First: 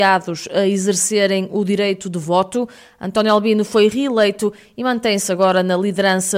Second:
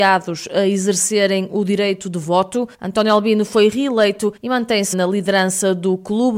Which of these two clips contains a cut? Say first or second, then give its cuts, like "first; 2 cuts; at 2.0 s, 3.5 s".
second; 3 cuts; at 2.7 s, 4.4 s, 4.9 s